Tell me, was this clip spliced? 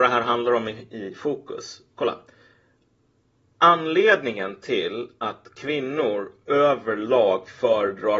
no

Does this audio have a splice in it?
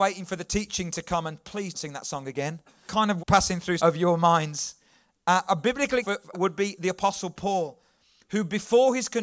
yes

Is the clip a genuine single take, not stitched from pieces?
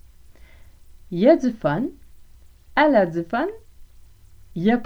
yes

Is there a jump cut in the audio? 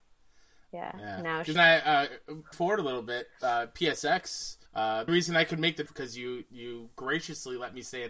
yes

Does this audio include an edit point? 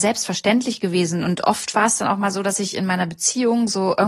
no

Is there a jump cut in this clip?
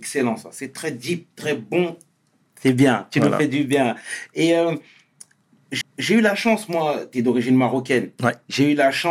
yes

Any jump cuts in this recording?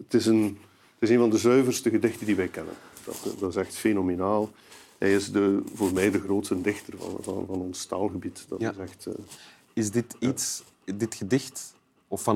no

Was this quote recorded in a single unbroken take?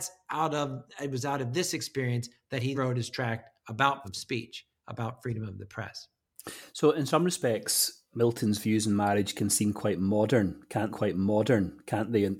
no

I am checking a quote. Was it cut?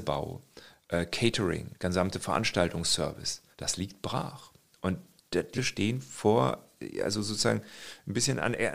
yes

